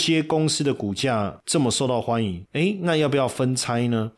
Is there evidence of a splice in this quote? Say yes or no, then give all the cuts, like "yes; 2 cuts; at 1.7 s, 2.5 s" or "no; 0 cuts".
no; 0 cuts